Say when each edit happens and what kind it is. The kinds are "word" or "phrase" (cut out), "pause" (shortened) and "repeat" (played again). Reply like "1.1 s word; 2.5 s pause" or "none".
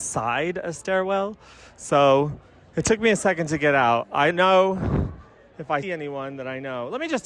4.3 s word; 5.8 s word